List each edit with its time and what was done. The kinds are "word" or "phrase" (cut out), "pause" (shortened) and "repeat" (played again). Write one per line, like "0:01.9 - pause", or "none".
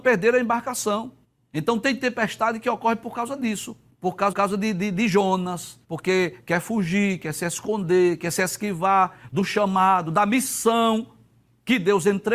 0:01.2 - pause
0:03.9 - pause
0:04.3 - repeat
0:05.8 - pause